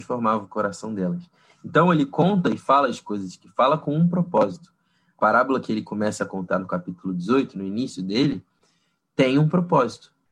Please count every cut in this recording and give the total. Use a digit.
0